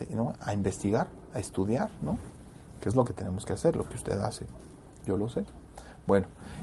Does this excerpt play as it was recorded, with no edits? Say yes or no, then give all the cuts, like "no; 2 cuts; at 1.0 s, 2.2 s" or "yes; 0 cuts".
yes; 0 cuts